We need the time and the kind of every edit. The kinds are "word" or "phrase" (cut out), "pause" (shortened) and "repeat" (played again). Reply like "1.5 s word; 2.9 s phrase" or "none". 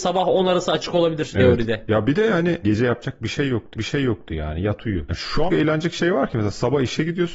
2.6 s phrase; 3.7 s repeat; 5.5 s phrase